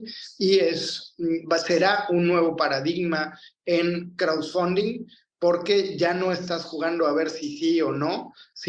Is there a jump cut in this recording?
no; 0 cuts

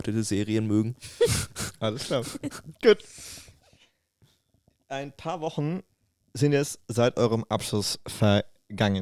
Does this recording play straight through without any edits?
yes; 0 cuts

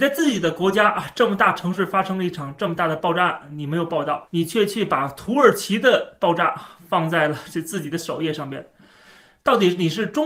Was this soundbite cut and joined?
no; 0 cuts

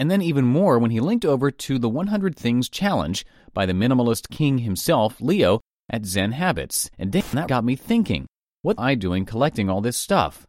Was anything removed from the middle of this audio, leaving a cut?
yes; 3 cuts; at 6.9 s, 7.5 s, 8.8 s

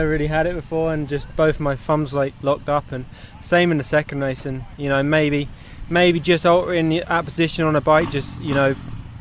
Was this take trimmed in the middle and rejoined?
no; 0 cuts

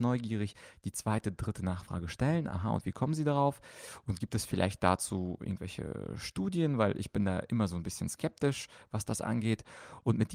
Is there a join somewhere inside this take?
yes; 1 cut; at 5.4 s

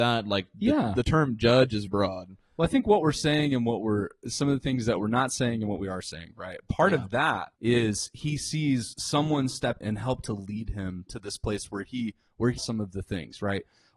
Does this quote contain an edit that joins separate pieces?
yes; 4 cuts; at 1.9 s, 7.6 s, 9.8 s, 12.6 s

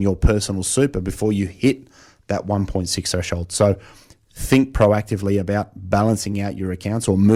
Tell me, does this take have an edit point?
no; 0 cuts

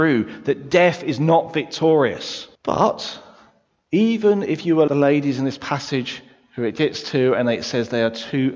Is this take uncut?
no; 2 cuts; at 2.5 s, 4.9 s

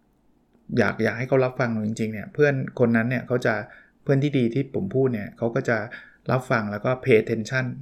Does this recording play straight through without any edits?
yes; 0 cuts

